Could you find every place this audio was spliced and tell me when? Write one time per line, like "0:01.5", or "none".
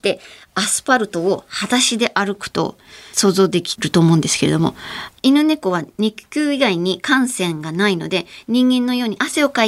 none